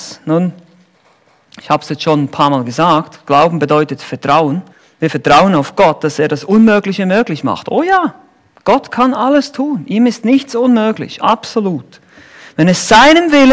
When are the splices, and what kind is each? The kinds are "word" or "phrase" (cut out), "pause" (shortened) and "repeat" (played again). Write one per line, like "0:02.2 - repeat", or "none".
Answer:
0:04.7 - pause